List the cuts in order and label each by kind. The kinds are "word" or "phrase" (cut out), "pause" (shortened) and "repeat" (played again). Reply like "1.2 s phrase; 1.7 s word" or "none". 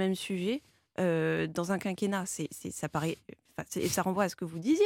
none